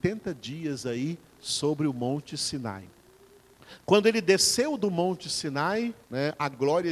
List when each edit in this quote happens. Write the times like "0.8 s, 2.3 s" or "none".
6.0 s